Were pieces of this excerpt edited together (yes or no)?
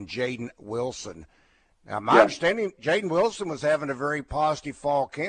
no